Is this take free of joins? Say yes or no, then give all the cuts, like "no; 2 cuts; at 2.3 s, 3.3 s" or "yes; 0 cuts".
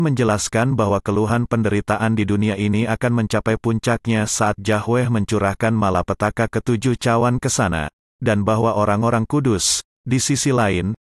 yes; 0 cuts